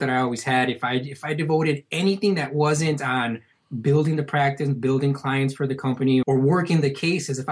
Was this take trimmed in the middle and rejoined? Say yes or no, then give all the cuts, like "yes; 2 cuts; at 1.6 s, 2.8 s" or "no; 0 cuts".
yes; 1 cut; at 6.2 s